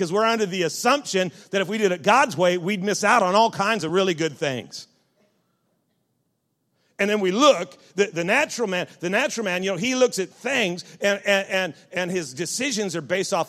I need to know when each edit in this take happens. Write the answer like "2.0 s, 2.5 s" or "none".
none

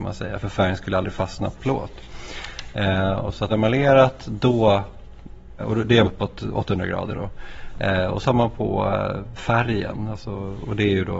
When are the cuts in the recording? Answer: 1.6 s, 3.5 s, 5.6 s, 6.0 s, 8.2 s, 9.4 s

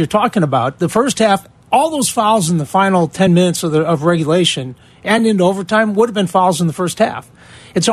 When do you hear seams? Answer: none

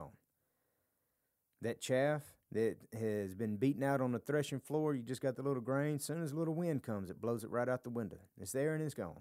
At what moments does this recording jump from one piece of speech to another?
2.4 s, 8.3 s

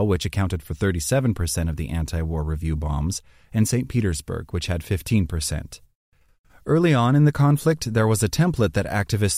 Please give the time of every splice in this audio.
none

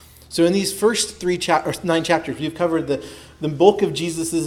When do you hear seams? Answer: none

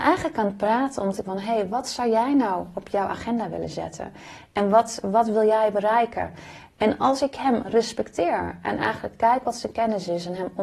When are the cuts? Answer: 1.2 s

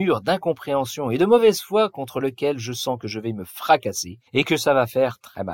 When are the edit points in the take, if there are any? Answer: 4.3 s

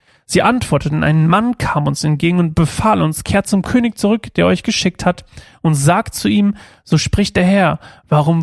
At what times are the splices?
none

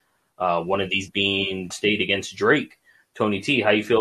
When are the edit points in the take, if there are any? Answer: 1.1 s, 1.7 s

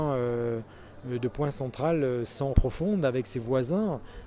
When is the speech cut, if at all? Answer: 2.5 s

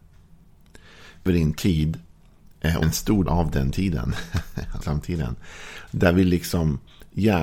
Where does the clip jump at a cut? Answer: 1.3 s, 2.8 s, 3.3 s, 4.8 s

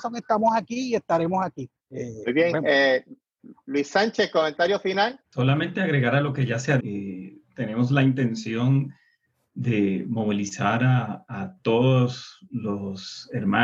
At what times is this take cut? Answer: 1.8 s, 5.2 s, 6.8 s

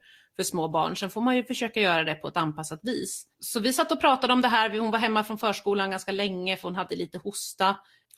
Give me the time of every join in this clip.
3.3 s, 6.9 s

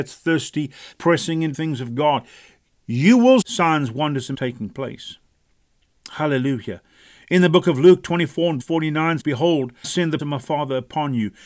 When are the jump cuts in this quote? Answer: 0.9 s, 1.5 s, 3.4 s, 4.3 s, 8.6 s, 9.2 s, 9.8 s, 10.2 s

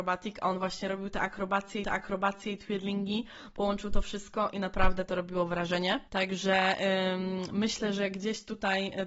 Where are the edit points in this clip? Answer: 1.8 s

